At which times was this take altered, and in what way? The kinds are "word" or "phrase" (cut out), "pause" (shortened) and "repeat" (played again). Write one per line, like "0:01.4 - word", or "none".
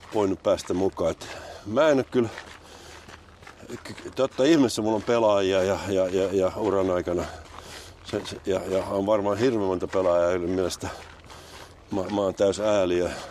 none